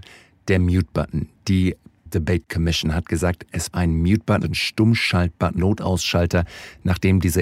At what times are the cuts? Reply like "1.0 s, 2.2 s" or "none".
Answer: 2.1 s, 3.7 s, 4.4 s, 5.6 s